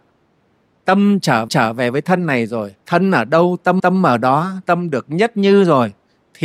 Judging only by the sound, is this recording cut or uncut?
cut